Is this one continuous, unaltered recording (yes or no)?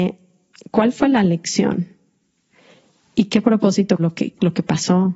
no